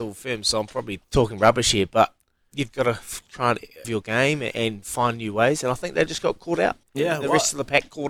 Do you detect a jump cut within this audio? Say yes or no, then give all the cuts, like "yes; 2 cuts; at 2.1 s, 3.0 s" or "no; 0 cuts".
yes; 4 cuts; at 1.0 s, 2.7 s, 3.8 s, 6.8 s